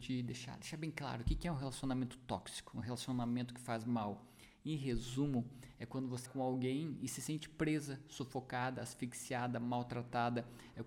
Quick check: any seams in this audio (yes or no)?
yes